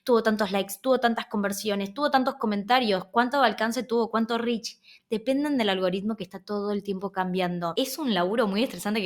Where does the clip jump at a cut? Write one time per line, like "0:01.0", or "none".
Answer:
none